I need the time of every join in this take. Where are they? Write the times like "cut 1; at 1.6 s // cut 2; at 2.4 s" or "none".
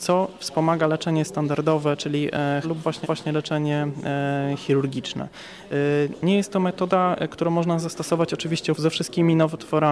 cut 1; at 2.6 s // cut 2; at 3.0 s // cut 3; at 8.7 s